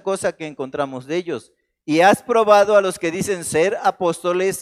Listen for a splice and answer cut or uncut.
uncut